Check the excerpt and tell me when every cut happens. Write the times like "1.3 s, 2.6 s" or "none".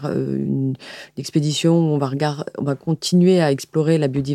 none